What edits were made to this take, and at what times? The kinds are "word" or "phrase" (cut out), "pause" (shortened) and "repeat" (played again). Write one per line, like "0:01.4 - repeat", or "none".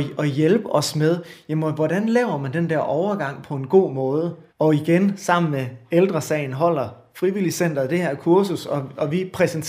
0:04.5 - pause